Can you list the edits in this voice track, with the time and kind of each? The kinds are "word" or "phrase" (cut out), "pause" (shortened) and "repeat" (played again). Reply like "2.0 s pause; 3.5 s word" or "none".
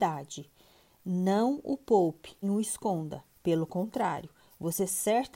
2.4 s word